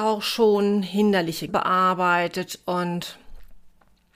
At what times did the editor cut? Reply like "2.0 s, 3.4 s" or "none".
1.5 s